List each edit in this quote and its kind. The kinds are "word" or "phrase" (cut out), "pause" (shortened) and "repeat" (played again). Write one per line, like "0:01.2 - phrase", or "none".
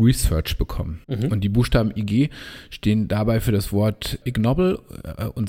0:01.0 - pause
0:04.2 - word